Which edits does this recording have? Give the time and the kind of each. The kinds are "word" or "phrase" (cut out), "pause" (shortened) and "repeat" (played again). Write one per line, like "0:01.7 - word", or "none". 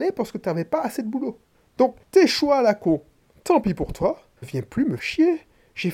0:02.0 - pause
0:04.4 - phrase
0:05.0 - word